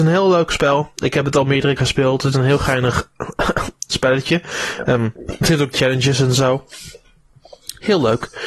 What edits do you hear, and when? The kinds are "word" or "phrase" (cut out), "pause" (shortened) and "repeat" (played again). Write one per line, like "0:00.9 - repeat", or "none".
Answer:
0:01.8 - word
0:02.3 - word
0:03.9 - word
0:05.4 - word
0:05.7 - word